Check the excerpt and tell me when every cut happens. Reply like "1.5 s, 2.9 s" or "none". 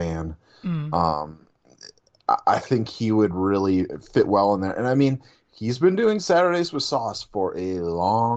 none

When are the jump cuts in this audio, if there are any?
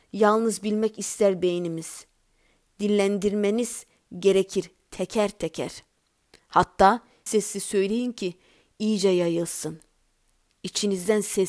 7.3 s

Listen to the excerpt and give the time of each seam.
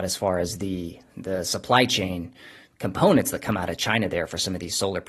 none

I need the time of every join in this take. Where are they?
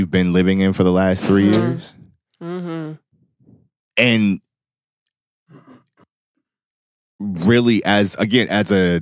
none

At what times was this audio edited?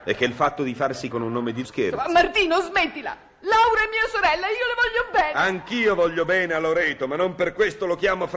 1.1 s, 1.6 s

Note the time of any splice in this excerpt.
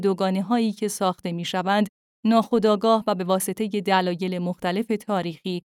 none

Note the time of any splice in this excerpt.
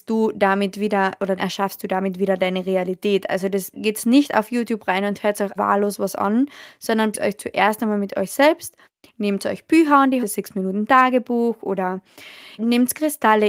1.4 s, 3.7 s, 5.6 s, 7.1 s, 10.2 s, 12.6 s

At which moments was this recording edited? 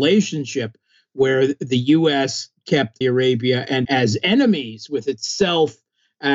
3.0 s, 3.8 s

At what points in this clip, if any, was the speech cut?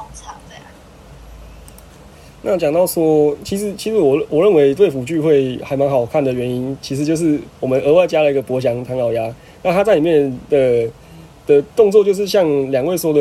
none

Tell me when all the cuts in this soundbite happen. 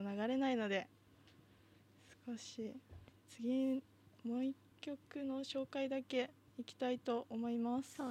none

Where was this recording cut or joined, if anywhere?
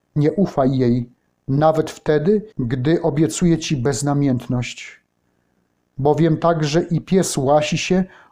2.5 s

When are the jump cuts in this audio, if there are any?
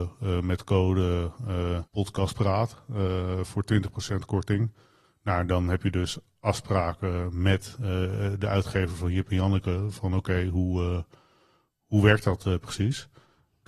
1.9 s

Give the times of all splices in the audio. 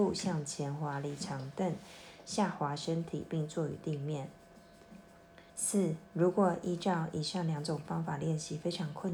5.5 s

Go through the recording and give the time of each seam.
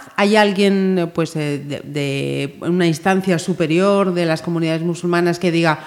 none

